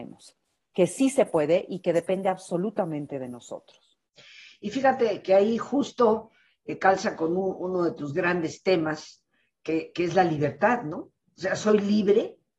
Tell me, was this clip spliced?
no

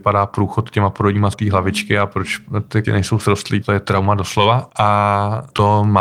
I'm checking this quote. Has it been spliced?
yes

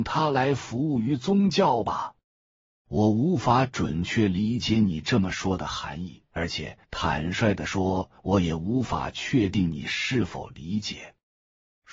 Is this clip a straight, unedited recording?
no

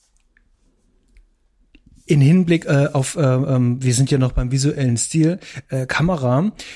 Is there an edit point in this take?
no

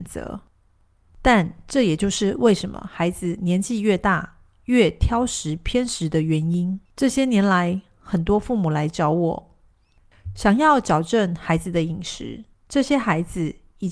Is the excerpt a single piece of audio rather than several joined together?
no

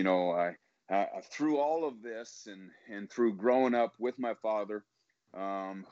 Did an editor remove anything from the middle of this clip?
no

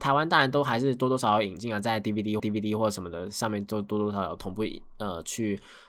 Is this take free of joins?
no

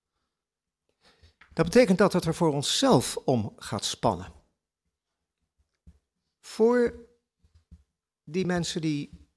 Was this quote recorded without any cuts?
yes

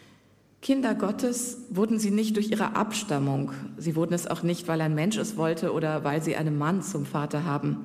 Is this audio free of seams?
yes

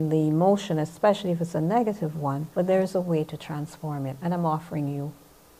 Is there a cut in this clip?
yes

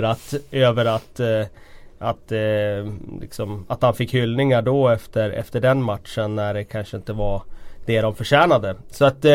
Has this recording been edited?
no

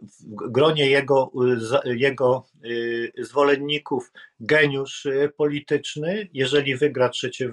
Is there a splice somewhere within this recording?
no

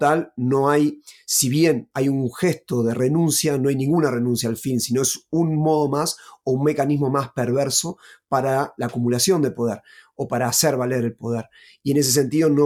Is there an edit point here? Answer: no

